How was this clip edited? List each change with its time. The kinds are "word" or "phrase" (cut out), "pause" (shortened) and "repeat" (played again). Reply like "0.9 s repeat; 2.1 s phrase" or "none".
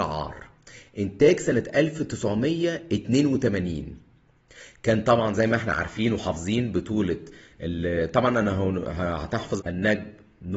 9.6 s word